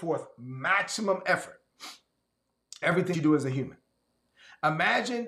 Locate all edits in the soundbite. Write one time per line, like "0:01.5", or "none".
0:02.8
0:03.1